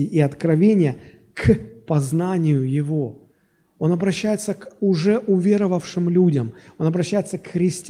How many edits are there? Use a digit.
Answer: 0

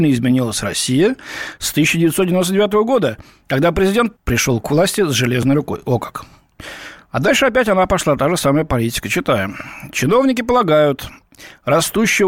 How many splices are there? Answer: 1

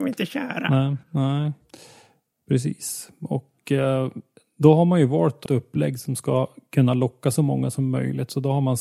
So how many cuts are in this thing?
2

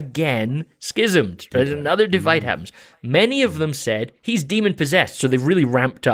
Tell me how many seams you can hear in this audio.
0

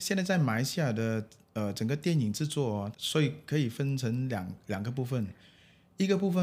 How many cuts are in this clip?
1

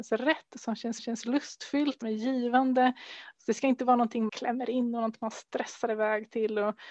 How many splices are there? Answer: 3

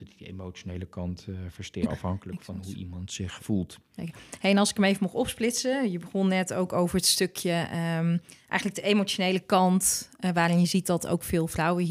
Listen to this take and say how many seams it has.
2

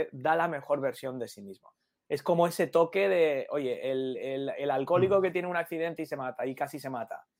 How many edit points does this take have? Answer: 0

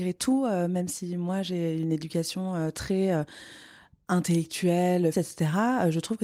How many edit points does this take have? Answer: 1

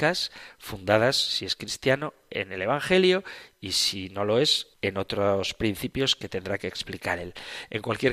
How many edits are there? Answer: 1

